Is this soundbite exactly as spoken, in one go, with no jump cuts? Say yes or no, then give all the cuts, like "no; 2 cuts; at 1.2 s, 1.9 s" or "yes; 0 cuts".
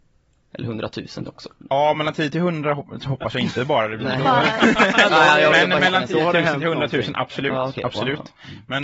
yes; 0 cuts